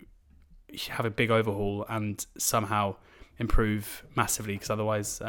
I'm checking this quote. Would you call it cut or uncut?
uncut